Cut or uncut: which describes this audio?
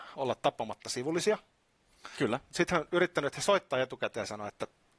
uncut